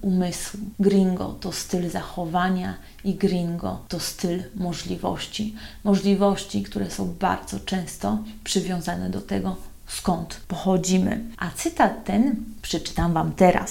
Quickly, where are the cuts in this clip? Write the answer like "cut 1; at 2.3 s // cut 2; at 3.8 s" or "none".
none